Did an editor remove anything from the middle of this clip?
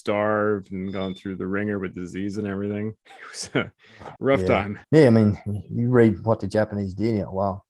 yes; 3 cuts; at 3.0 s, 4.2 s, 4.8 s

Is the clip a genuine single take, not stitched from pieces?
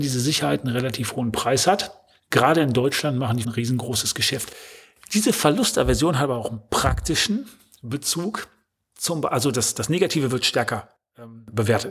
no; 1 cut; at 3.4 s

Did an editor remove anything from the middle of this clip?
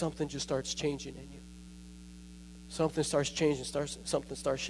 no; 0 cuts

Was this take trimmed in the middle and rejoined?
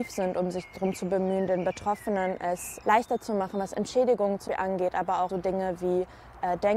yes; 3 cuts; at 2.8 s, 4.5 s, 5.3 s

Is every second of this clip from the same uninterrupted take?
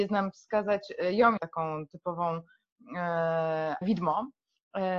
no; 2 cuts; at 1.4 s, 3.8 s

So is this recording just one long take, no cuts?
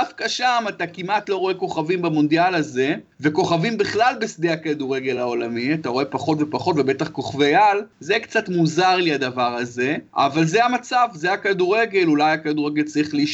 yes; 0 cuts

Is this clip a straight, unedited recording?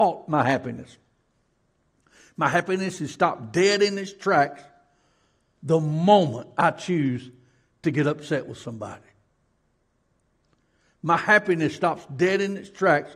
yes; 0 cuts

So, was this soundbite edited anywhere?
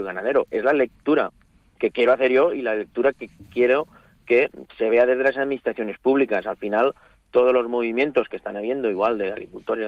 no; 0 cuts

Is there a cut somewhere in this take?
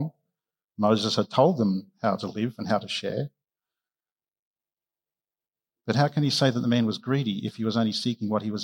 no; 0 cuts

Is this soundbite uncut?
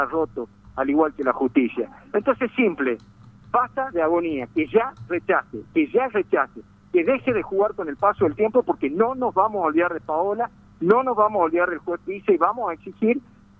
yes; 0 cuts

